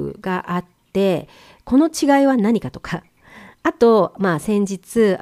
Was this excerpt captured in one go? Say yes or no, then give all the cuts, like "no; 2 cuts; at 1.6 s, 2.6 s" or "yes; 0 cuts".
yes; 0 cuts